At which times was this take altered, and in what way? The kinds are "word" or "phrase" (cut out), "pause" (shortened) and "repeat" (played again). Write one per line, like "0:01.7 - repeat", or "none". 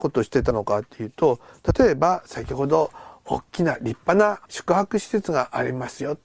0:04.5 - pause